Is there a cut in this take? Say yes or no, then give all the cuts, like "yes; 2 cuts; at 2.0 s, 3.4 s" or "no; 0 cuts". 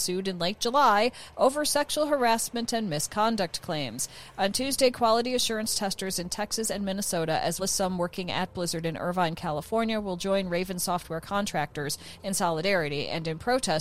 yes; 1 cut; at 7.6 s